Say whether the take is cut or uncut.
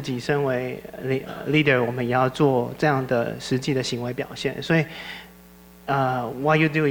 uncut